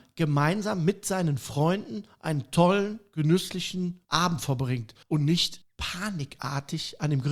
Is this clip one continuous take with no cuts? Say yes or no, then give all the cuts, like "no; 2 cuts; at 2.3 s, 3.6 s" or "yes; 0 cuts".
no; 3 cuts; at 4.0 s, 5.0 s, 5.6 s